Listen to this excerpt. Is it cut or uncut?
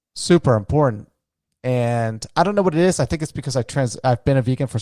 uncut